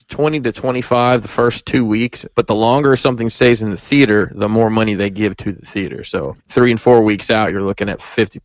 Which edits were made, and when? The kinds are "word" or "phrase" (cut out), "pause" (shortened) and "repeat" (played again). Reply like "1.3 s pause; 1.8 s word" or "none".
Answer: 2.3 s pause; 6.4 s pause